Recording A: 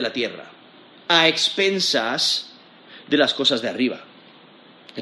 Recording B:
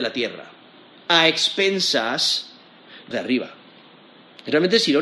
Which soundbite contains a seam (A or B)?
B